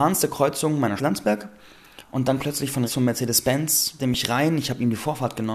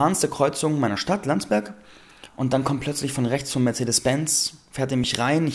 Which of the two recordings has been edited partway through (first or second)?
first